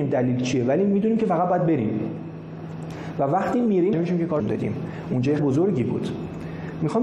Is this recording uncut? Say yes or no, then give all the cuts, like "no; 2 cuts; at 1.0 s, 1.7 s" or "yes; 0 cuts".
no; 3 cuts; at 3.9 s, 4.4 s, 5.4 s